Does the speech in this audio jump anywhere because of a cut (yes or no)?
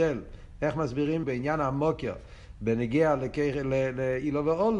yes